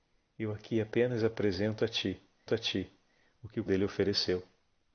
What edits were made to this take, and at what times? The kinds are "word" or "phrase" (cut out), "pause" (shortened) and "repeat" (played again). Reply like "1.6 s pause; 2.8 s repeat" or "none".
2.5 s repeat; 3.7 s word